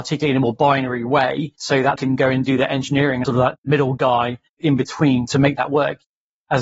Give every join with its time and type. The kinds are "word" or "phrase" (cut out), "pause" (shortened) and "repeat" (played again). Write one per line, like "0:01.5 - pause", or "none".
0:01.6 - pause
0:02.0 - word
0:03.2 - word
0:04.5 - pause